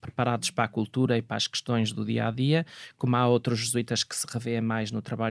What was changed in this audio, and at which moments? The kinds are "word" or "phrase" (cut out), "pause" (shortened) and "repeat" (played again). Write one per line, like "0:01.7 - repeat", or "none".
none